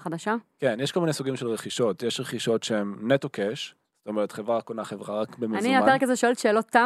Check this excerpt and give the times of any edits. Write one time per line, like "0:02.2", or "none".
none